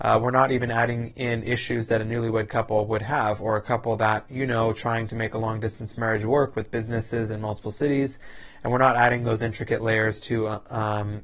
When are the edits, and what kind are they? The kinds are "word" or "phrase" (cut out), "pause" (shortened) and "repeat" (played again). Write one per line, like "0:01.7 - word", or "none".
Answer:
none